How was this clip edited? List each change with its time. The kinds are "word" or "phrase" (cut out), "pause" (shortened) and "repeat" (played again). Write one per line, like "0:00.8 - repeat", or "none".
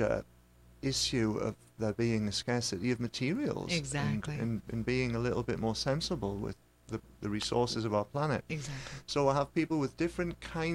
none